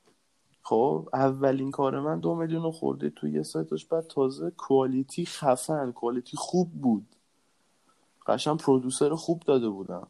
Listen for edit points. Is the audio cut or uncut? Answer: uncut